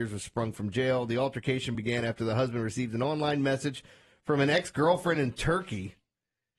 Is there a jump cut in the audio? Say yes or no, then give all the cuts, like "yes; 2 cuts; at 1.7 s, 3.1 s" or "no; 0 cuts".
no; 0 cuts